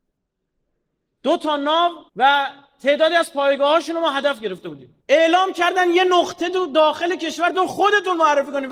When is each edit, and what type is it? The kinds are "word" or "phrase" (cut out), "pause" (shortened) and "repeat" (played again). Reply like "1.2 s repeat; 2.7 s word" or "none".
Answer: 2.1 s pause; 5.0 s pause